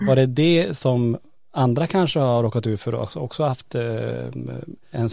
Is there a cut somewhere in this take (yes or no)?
no